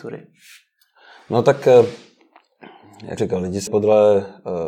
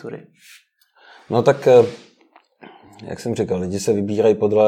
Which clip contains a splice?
first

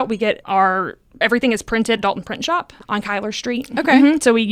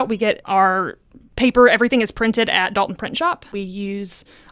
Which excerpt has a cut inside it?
first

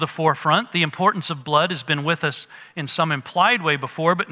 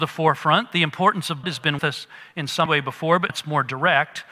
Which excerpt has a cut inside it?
second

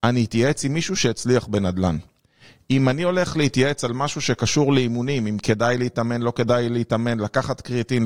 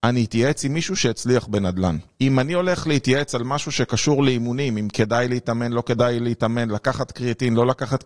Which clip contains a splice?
second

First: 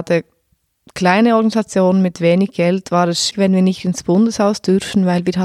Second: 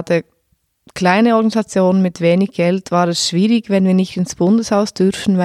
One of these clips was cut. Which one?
first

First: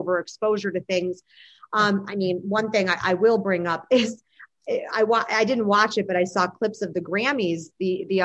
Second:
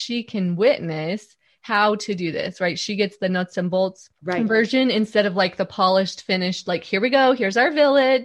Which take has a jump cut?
second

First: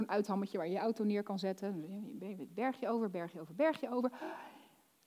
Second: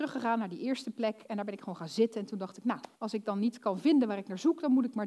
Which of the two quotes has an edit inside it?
second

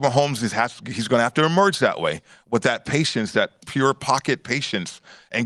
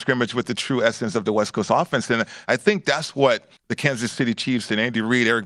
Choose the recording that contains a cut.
second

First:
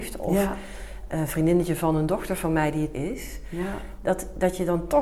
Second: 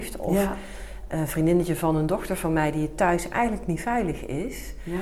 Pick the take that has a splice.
first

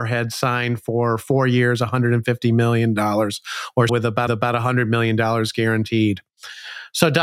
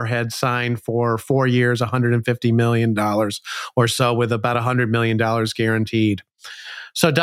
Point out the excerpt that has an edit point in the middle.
first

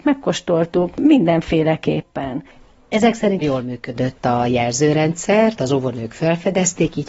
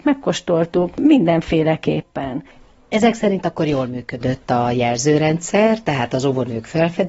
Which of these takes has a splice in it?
first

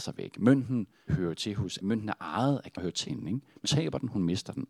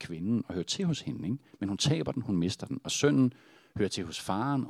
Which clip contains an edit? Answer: first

